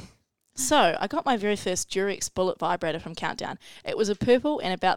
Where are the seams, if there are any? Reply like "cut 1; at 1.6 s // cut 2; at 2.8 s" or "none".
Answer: none